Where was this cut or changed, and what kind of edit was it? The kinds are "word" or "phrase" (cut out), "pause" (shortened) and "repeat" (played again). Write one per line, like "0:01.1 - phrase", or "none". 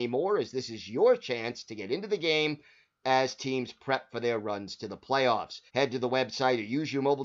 0:05.7 - pause